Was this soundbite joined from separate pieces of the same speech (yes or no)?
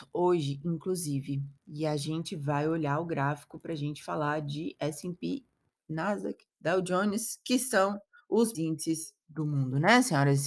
yes